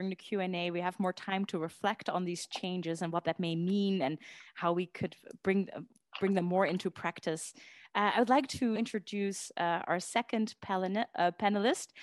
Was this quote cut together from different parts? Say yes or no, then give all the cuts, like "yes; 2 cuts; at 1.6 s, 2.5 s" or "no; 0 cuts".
yes; 1 cut; at 8.8 s